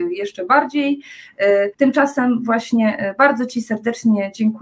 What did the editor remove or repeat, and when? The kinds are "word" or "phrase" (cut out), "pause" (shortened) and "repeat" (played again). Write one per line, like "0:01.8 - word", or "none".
0:01.7 - pause

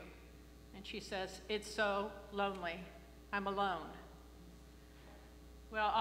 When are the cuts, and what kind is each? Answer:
none

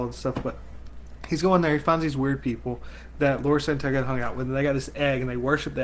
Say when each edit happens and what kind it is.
none

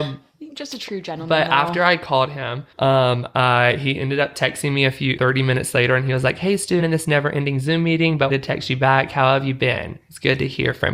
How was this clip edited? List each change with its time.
0:02.7 - pause
0:05.2 - word
0:06.8 - phrase
0:08.3 - word

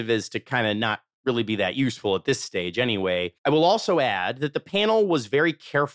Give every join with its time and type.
0:03.4 - pause

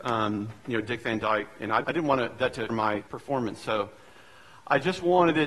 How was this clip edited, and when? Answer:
0:01.8 - word
0:02.7 - word
0:03.1 - word

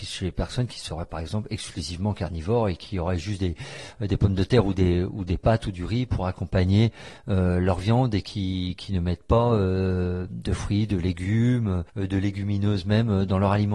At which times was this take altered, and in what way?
0:11.9 - pause

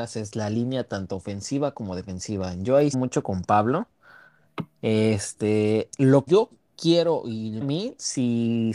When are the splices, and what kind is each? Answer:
0:02.9 - phrase
0:06.3 - word
0:07.6 - phrase

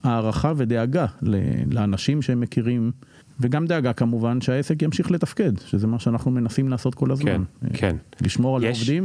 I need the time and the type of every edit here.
0:03.2 - pause

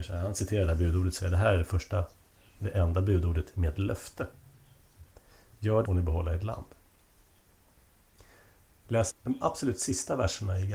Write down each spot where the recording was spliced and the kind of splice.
0:05.9 - phrase
0:09.1 - word

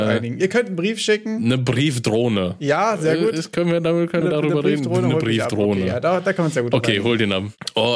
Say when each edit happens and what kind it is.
0:04.2 - word

